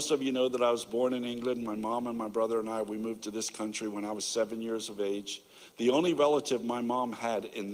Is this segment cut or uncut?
uncut